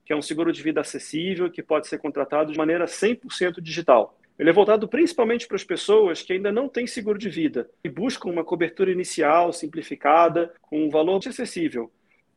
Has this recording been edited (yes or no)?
yes